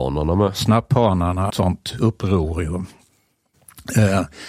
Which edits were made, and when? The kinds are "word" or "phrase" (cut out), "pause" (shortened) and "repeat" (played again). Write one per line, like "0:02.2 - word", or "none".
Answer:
0:01.5 - phrase